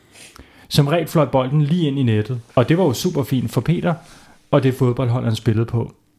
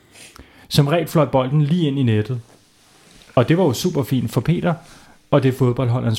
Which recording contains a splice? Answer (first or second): first